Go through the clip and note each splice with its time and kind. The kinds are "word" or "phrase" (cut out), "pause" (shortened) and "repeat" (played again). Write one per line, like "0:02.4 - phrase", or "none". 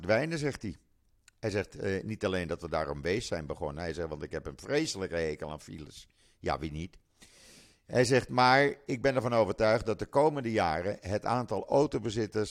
none